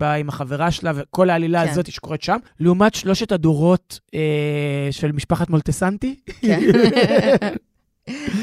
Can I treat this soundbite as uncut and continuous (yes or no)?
no